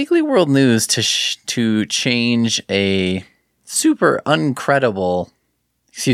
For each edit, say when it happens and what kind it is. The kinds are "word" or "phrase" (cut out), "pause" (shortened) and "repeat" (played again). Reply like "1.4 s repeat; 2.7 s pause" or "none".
none